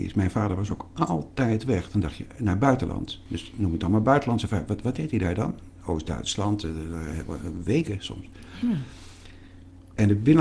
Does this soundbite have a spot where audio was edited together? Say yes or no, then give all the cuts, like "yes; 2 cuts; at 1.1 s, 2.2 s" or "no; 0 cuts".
no; 0 cuts